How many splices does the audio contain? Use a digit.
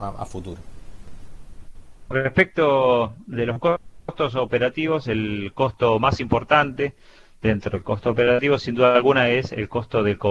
0